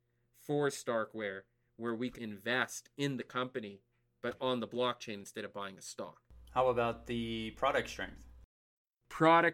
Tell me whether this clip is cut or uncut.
cut